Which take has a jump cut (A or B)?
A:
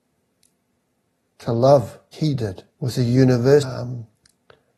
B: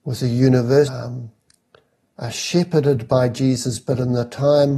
A